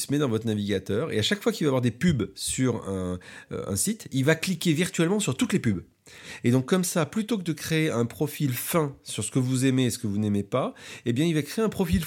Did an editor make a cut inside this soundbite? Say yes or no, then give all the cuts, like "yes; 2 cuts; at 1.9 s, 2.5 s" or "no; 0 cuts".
no; 0 cuts